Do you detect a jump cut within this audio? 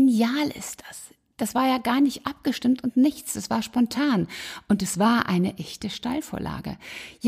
no; 0 cuts

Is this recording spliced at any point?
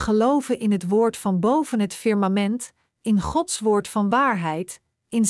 no; 0 cuts

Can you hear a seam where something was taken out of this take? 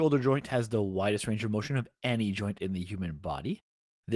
no; 0 cuts

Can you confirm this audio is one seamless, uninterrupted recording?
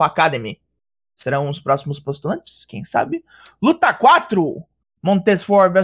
yes; 0 cuts

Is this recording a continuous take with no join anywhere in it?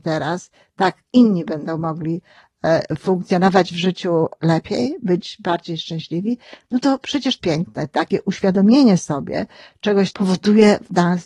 no; 2 cuts; at 7.4 s, 10.1 s

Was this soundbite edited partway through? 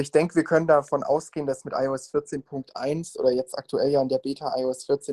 no; 0 cuts

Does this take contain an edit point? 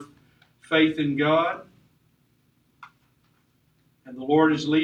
no; 0 cuts

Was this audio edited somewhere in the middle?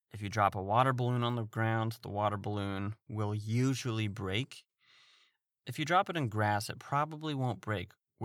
no; 0 cuts

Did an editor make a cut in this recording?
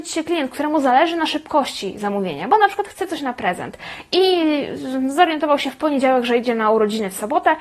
no; 0 cuts

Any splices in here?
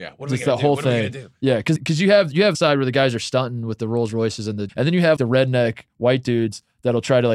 yes; 4 cuts; at 1.8 s, 2.5 s, 4.7 s, 5.2 s

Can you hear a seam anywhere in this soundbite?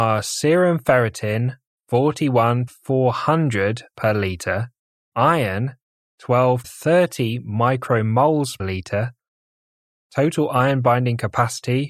yes; 5 cuts; at 2.7 s, 3.9 s, 5.1 s, 6.6 s, 8.6 s

